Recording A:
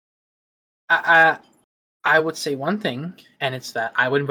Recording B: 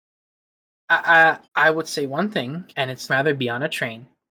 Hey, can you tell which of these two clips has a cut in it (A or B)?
B